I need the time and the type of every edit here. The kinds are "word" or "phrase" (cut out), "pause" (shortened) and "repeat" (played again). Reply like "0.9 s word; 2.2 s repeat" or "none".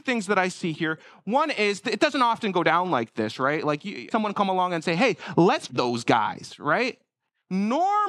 4.1 s phrase; 5.7 s phrase